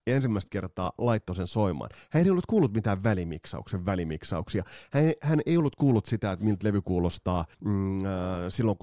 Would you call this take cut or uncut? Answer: cut